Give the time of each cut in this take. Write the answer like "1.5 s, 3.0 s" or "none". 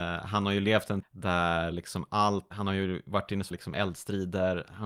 1.0 s, 1.7 s, 2.5 s, 3.5 s